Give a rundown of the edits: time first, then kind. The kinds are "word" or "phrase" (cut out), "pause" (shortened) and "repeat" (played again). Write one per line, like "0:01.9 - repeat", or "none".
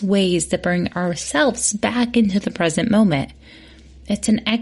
none